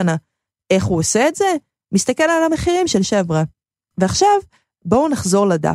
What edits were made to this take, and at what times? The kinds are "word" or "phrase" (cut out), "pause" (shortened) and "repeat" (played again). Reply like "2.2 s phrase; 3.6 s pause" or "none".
3.0 s word